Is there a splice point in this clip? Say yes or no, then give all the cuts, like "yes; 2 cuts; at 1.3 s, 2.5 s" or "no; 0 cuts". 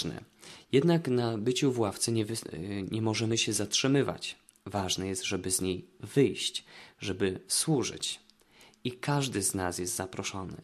no; 0 cuts